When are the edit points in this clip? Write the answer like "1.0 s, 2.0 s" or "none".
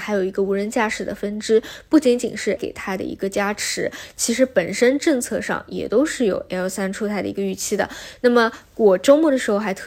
2.6 s